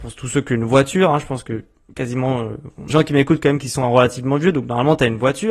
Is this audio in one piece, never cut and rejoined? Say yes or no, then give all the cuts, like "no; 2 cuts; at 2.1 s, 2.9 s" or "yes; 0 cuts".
no; 1 cut; at 2.9 s